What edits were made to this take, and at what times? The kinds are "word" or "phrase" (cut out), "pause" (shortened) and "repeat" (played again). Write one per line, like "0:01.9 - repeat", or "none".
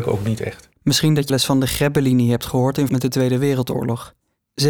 0:01.3 - word
0:02.9 - word